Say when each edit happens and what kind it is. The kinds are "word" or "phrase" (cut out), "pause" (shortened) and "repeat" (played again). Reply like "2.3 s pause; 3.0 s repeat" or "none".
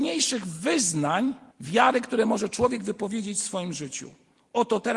1.5 s pause

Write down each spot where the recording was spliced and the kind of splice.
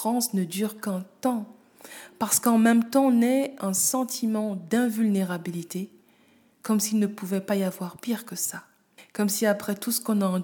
none

